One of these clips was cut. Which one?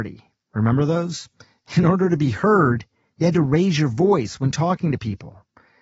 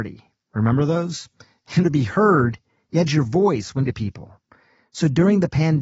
second; 3 cuts; at 1.8 s, 3.1 s, 3.9 s

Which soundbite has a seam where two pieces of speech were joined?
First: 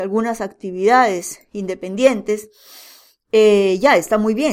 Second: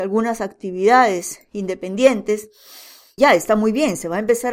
second; 1 cut; at 3.2 s

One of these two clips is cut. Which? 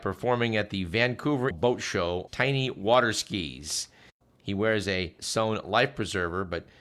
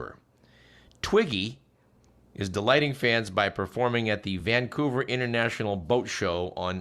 first; 3 cuts; at 1.5 s, 2.3 s, 5.2 s

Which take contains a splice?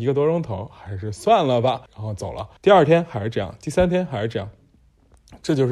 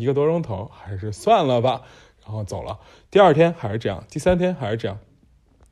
first; 2 cuts; at 1.9 s, 2.6 s

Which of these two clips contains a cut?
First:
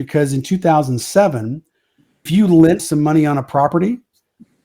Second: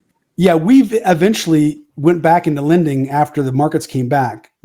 first; 2 cuts; at 2.3 s, 2.8 s

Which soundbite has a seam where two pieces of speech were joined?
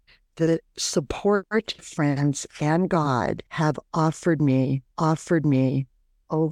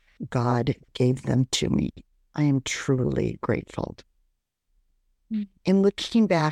first; 3 cuts; at 1.8 s, 3.5 s, 4.9 s

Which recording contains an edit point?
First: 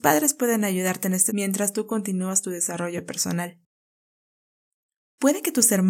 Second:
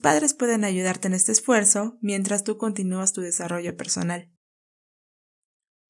first; 1 cut; at 1.3 s

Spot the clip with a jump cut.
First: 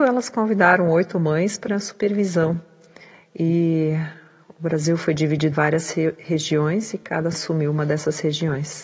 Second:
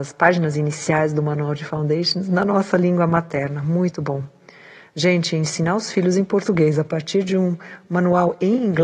first; 3 cuts; at 1.7 s, 5.5 s, 7.3 s

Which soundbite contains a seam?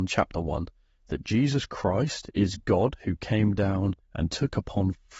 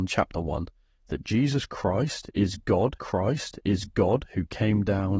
second; 1 cut; at 3.0 s

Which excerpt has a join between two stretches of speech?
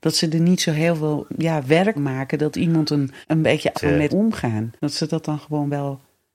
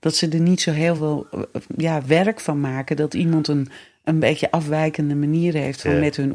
first; 6 cuts; at 1.3 s, 2.0 s, 3.2 s, 3.7 s, 4.1 s, 4.8 s

